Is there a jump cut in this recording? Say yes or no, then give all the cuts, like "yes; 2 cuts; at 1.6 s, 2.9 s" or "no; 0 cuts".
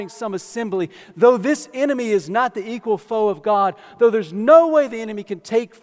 no; 0 cuts